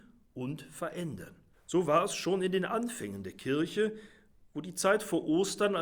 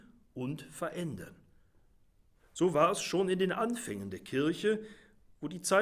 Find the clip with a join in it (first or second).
first